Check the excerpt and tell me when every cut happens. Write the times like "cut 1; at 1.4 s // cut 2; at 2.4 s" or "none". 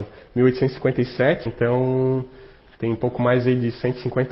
cut 1; at 1.5 s // cut 2; at 2.6 s